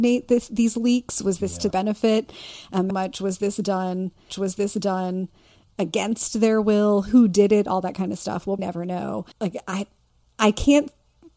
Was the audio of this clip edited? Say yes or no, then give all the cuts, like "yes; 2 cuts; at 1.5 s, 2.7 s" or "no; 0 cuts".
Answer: yes; 5 cuts; at 1.7 s, 2.9 s, 4.3 s, 8.6 s, 9.3 s